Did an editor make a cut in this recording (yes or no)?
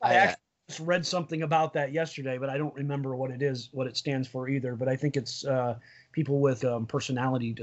no